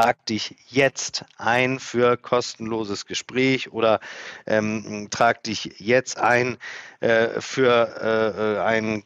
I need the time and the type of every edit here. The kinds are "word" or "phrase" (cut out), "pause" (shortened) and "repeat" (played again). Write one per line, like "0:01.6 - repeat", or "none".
none